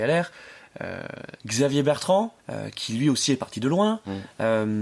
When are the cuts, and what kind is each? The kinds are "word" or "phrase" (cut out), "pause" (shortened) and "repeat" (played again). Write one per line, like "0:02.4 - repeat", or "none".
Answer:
0:01.4 - pause
0:02.4 - pause